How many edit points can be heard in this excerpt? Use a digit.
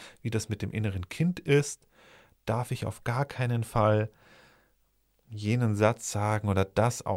0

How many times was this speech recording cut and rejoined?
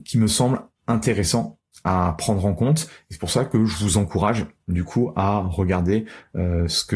0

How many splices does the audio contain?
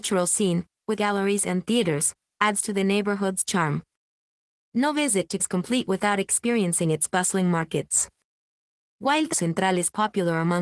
3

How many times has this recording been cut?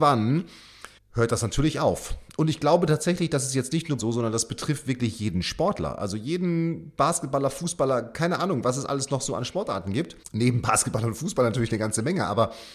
3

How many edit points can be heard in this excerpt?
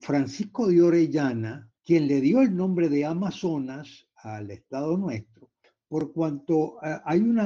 2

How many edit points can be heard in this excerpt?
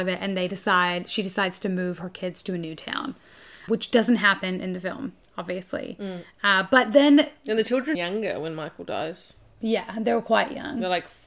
2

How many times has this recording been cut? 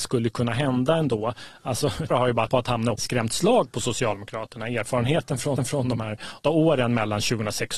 5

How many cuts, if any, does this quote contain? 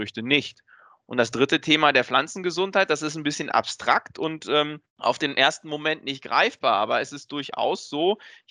1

